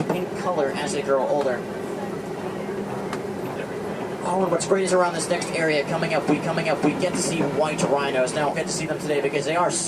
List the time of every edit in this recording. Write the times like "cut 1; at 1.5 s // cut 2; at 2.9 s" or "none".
cut 1; at 4.9 s // cut 2; at 6.4 s // cut 3; at 8.5 s